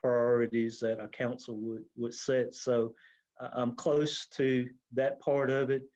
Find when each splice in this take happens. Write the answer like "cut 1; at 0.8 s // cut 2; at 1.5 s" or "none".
none